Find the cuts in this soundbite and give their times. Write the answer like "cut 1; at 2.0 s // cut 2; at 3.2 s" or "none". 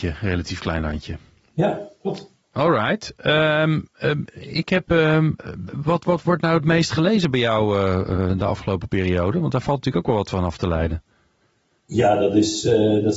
none